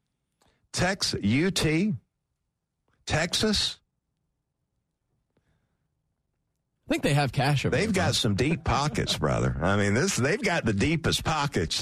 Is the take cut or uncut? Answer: uncut